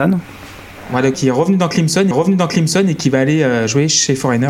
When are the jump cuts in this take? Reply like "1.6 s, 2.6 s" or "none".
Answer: 1.1 s, 2.1 s